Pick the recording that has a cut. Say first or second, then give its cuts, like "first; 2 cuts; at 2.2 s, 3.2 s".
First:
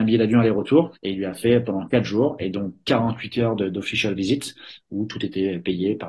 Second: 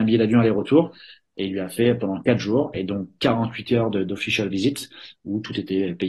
first; 1 cut; at 1.0 s